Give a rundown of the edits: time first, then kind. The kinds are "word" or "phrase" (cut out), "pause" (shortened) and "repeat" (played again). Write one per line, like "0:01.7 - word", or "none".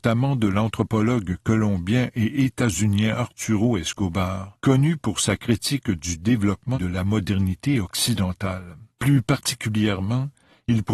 0:04.6 - pause
0:06.7 - word
0:08.9 - pause